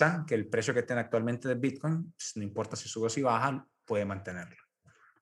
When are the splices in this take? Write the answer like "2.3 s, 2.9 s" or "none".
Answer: none

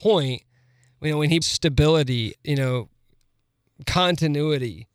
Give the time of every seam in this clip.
1.4 s, 2.3 s

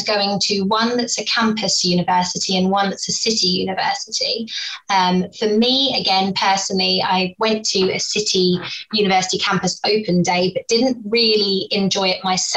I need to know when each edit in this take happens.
none

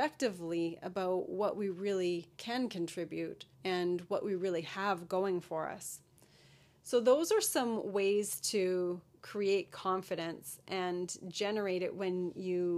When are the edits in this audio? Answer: 2.3 s, 3.5 s

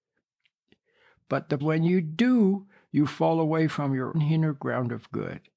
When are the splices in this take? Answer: 1.6 s, 4.1 s

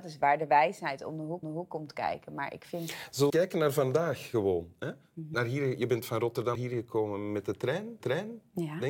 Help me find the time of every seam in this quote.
1.4 s, 3.3 s, 5.3 s, 6.5 s, 8.0 s

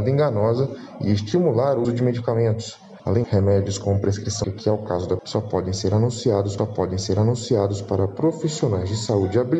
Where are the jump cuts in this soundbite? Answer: 1.8 s, 3.2 s, 4.4 s, 5.2 s, 6.6 s

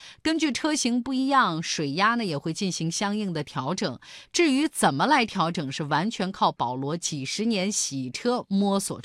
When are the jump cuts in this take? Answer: none

